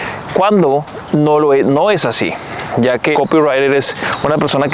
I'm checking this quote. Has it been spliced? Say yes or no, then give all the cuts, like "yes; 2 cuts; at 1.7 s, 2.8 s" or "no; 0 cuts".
yes; 1 cut; at 3.1 s